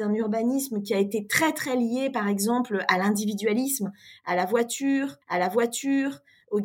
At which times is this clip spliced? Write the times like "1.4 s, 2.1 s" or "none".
5.2 s

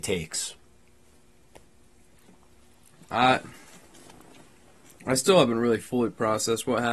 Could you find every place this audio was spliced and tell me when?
none

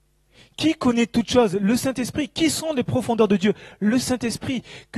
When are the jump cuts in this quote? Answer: none

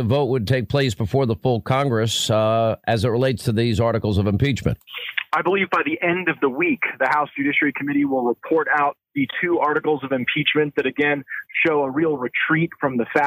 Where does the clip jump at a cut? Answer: none

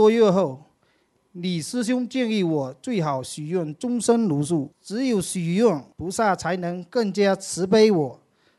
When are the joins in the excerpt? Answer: 4.7 s, 5.9 s

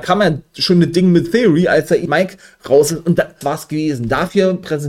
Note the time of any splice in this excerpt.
2.1 s, 3.4 s

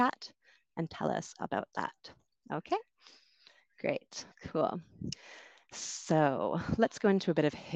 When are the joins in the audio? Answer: 4.3 s

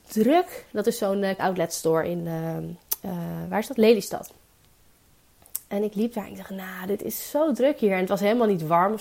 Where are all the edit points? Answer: 1.4 s

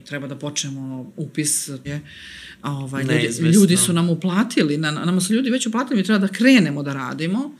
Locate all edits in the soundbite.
1.8 s

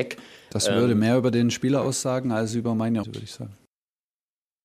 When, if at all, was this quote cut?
3.0 s

